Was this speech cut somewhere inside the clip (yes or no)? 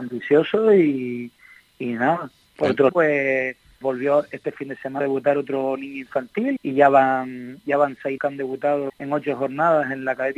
yes